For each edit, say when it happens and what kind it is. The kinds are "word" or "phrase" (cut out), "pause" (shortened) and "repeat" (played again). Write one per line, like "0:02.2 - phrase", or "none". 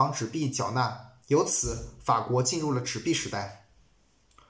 0:01.2 - pause